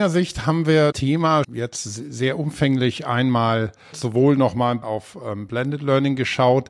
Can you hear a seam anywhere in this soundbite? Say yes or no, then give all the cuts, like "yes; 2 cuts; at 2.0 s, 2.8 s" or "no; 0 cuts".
yes; 4 cuts; at 0.9 s, 1.4 s, 3.9 s, 4.8 s